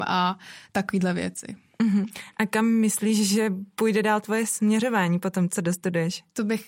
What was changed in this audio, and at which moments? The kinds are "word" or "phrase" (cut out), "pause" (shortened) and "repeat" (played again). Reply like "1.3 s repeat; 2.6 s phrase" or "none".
none